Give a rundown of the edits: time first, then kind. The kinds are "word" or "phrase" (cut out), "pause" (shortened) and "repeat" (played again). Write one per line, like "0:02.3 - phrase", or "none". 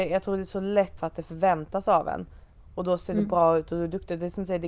0:01.0 - phrase